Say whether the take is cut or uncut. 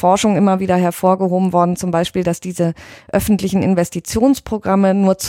uncut